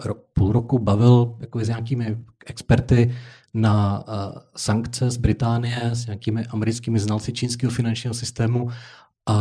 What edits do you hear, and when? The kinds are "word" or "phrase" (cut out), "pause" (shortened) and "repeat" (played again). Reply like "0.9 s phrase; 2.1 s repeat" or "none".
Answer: none